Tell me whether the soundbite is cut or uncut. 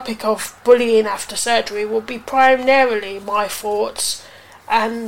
uncut